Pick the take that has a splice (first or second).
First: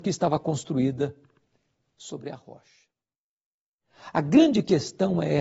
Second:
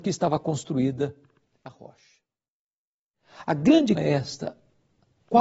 second